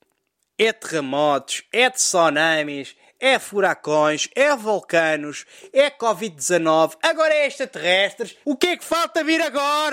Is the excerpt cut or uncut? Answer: cut